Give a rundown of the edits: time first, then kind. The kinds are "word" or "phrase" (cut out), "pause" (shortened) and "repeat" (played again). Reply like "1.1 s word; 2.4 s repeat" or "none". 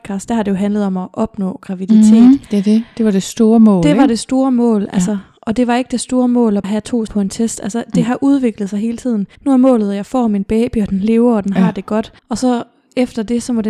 6.6 s word; 7.1 s word; 9.4 s pause; 12.2 s pause